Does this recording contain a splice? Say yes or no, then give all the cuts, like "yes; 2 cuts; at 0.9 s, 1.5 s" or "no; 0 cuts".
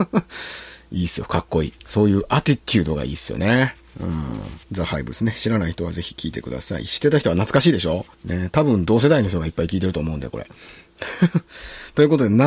yes; 3 cuts; at 1.8 s, 4.6 s, 8.1 s